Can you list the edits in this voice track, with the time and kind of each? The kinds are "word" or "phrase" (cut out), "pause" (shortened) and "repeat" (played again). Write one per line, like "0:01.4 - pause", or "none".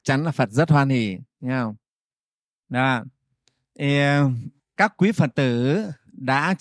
0:02.1 - pause